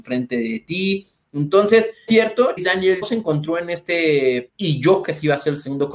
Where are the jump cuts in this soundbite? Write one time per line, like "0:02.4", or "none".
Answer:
0:02.1
0:02.6
0:03.0
0:04.5
0:05.0